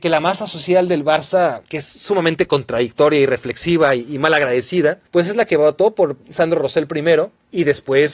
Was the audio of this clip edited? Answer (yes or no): yes